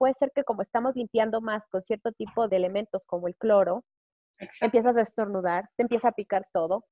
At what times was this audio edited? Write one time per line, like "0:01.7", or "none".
0:02.5